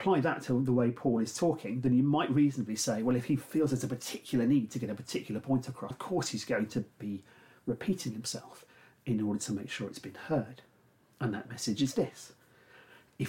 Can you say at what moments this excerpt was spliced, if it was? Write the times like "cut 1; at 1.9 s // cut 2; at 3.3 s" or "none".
cut 1; at 5.9 s // cut 2; at 6.9 s